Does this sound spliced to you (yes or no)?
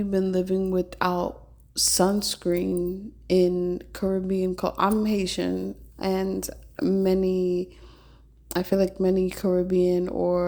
no